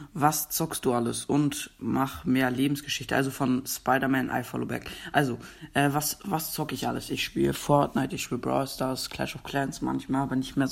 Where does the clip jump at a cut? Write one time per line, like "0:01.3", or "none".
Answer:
none